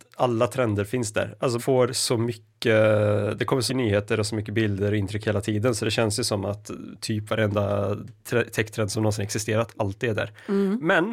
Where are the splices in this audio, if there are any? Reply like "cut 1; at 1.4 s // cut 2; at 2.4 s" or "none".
cut 1; at 1.6 s // cut 2; at 3.7 s